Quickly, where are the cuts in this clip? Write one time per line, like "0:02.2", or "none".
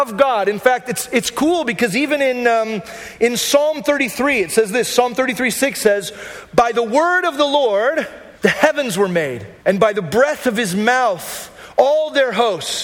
0:08.4
0:09.6